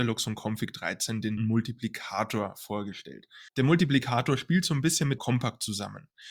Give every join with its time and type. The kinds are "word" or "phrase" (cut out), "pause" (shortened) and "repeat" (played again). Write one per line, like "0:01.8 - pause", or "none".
0:01.4 - word
0:03.5 - pause
0:05.2 - phrase